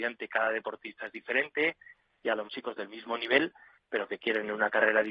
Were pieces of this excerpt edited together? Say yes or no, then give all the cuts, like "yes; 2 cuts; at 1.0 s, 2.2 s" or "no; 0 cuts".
yes; 1 cut; at 2.5 s